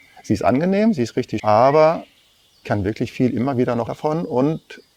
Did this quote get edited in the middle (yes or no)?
yes